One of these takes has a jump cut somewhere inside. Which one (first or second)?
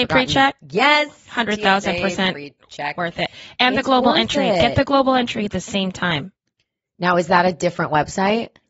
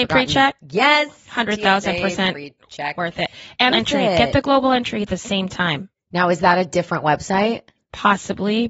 second